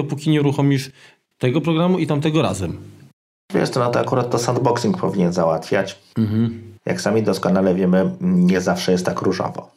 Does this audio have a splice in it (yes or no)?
no